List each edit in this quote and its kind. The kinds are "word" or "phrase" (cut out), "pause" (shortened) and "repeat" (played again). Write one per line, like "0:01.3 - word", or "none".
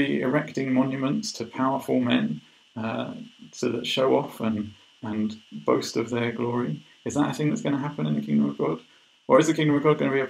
none

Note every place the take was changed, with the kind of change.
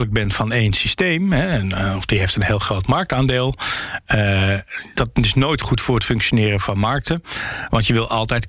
none

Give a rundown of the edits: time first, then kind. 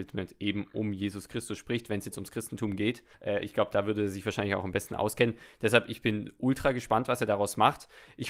0:03.1 - pause

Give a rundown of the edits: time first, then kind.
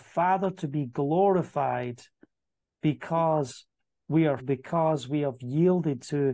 0:04.4 - word

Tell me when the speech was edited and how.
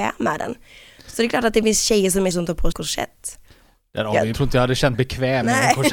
0:02.3 - word
0:02.7 - word
0:04.3 - phrase
0:04.9 - word

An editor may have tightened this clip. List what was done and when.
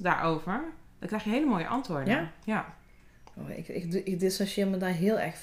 none

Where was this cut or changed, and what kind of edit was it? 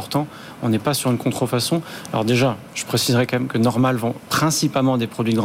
none

